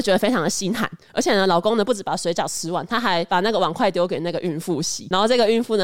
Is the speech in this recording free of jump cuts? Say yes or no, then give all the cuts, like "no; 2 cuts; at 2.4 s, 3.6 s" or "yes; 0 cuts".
yes; 0 cuts